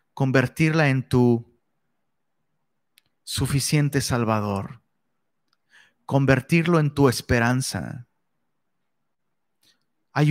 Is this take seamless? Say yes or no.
yes